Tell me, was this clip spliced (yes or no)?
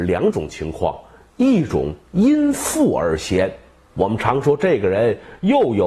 no